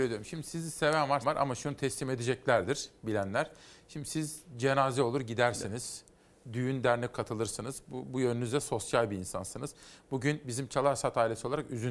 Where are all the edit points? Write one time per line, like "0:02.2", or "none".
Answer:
0:01.2
0:07.1